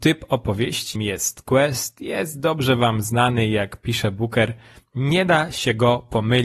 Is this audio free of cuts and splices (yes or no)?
no